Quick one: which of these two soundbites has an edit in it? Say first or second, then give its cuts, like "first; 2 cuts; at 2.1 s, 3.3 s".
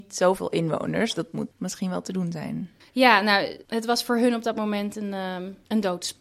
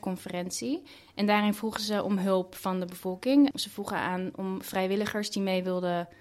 first; 1 cut; at 2.8 s